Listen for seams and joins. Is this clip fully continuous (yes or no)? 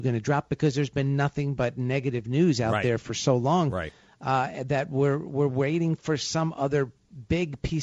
yes